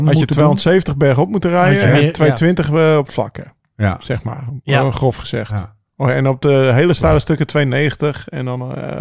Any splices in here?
no; 0 cuts

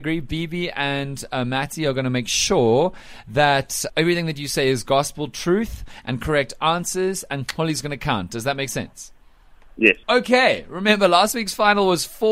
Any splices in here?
yes; 2 cuts; at 3.9 s, 10.0 s

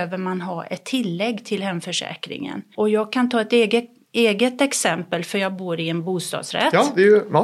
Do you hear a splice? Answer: yes; 1 cut; at 2.7 s

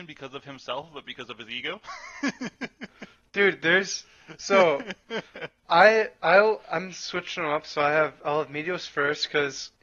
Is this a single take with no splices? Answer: yes; 0 cuts

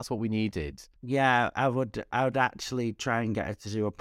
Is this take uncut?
no; 1 cut; at 1.0 s

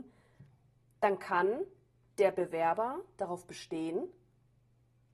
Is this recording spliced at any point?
no; 0 cuts

